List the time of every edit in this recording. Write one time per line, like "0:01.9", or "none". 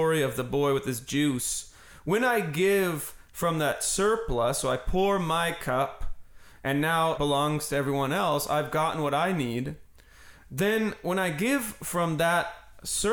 0:07.2